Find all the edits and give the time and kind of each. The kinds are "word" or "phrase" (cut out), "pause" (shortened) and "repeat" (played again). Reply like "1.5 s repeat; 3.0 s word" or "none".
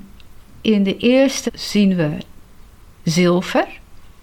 1.5 s word